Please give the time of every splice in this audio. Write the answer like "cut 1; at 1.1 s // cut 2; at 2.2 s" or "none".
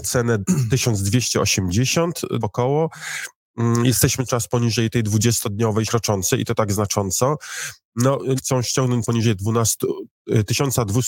cut 1; at 2.4 s // cut 2; at 4.3 s // cut 3; at 5.9 s // cut 4; at 8.4 s // cut 5; at 9.0 s